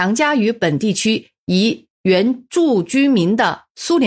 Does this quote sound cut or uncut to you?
cut